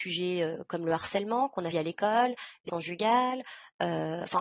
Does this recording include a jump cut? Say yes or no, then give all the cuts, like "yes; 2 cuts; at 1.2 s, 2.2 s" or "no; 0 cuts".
yes; 2 cuts; at 1.7 s, 2.7 s